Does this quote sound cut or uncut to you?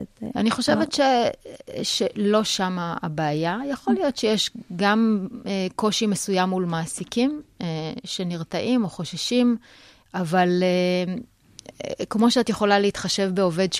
uncut